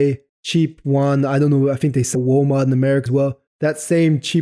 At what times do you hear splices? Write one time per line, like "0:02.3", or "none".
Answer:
0:02.1
0:03.1